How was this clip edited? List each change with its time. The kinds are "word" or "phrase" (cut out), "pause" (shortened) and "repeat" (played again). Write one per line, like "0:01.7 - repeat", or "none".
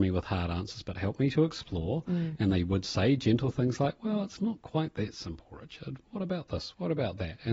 none